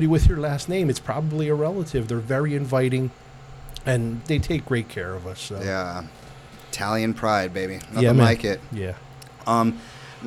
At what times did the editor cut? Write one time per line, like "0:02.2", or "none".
0:04.2